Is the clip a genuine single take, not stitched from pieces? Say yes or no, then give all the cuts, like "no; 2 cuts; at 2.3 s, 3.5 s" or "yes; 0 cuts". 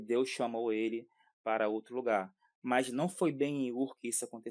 yes; 0 cuts